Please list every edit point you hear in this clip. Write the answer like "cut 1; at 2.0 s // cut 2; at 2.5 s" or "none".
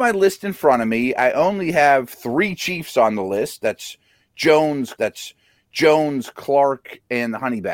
cut 1; at 5.0 s